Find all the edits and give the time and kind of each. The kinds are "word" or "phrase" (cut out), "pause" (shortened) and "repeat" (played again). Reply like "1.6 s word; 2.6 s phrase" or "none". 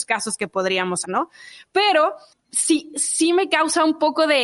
1.0 s word; 2.3 s word